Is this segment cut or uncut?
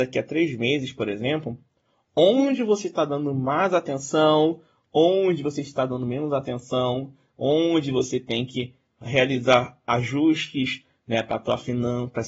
uncut